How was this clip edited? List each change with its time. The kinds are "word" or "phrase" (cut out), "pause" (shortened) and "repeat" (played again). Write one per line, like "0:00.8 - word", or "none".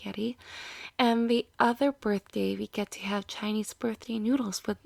none